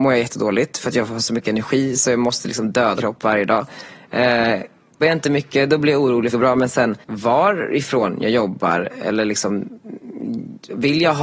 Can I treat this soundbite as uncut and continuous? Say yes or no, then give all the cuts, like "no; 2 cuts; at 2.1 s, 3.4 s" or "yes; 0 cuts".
no; 4 cuts; at 3.0 s, 5.0 s, 6.3 s, 7.0 s